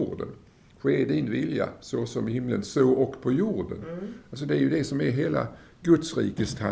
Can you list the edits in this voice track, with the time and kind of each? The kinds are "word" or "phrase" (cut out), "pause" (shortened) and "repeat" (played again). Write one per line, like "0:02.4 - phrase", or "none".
none